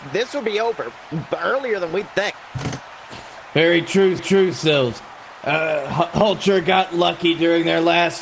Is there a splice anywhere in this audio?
yes; 1 cut; at 4.2 s

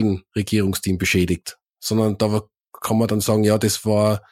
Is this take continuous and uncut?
yes; 0 cuts

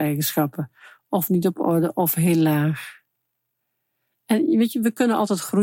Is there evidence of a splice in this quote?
no; 0 cuts

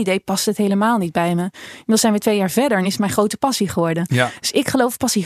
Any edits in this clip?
no; 0 cuts

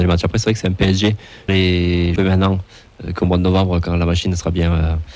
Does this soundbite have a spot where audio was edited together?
yes; 2 cuts; at 1.5 s, 2.2 s

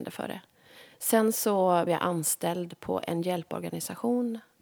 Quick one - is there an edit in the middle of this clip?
yes; 1 cut; at 1.9 s

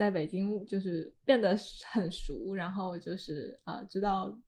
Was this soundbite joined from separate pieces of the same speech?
yes; 1 cut; at 1.2 s

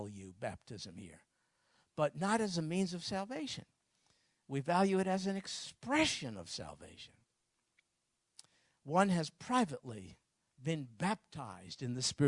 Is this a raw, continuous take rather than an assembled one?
yes; 0 cuts

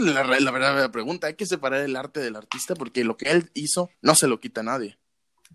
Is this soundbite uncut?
no; 1 cut; at 3.9 s

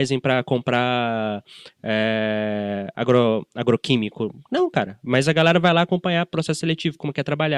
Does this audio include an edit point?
no; 0 cuts

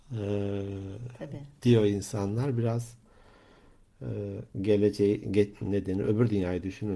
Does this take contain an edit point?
no; 0 cuts

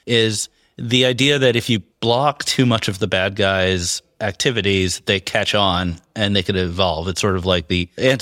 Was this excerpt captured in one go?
no; 1 cut; at 1.9 s

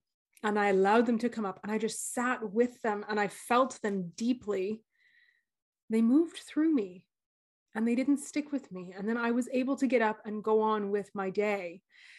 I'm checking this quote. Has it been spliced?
no; 0 cuts

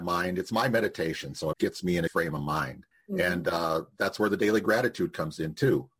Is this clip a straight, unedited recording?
no; 3 cuts; at 1.5 s, 2.1 s, 2.9 s

